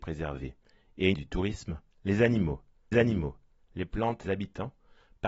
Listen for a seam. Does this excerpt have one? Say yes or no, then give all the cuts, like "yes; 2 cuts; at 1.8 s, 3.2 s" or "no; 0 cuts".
yes; 3 cuts; at 1.1 s, 2.9 s, 4.2 s